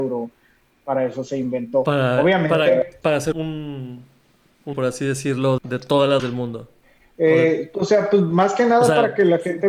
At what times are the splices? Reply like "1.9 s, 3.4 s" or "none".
3.0 s, 3.3 s, 4.7 s, 5.6 s, 6.2 s, 6.8 s